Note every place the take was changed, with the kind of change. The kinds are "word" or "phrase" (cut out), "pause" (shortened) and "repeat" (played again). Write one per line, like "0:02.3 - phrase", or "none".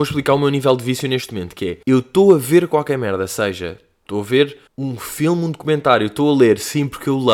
0:01.8 - pause
0:04.7 - pause